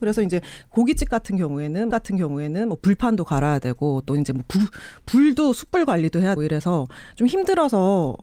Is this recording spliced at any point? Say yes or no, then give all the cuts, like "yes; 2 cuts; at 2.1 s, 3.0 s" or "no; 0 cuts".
yes; 2 cuts; at 1.9 s, 6.4 s